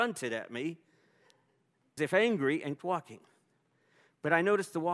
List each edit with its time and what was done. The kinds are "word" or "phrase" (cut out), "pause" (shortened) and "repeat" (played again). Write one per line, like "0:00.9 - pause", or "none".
0:02.0 - word
0:02.8 - word